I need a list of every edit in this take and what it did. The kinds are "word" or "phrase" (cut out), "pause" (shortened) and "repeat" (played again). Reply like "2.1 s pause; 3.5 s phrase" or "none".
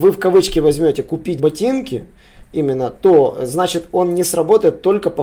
1.4 s word